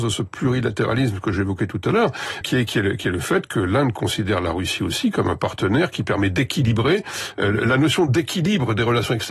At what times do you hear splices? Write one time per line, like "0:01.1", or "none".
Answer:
0:02.4

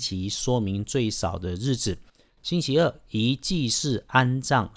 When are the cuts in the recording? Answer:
none

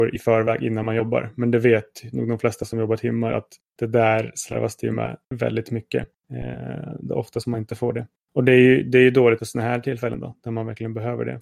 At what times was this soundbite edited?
0:03.6
0:05.2
0:06.1
0:08.2
0:09.4

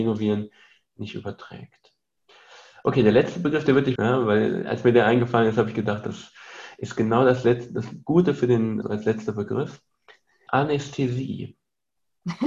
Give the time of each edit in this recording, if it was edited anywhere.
0:04.0
0:08.8
0:10.5

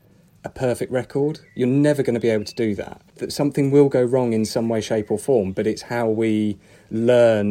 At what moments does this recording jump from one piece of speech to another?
0:03.1

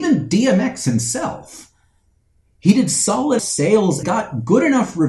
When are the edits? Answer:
0:03.4
0:04.0

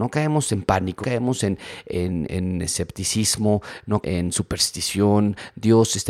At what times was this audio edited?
0:01.0
0:02.3
0:04.0

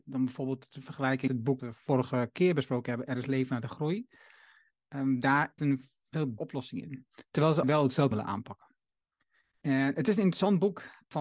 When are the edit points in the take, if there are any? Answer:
0:01.3
0:01.6
0:05.6
0:06.4
0:07.6
0:08.1

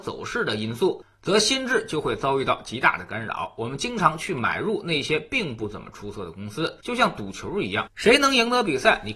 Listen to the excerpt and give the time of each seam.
0:06.8

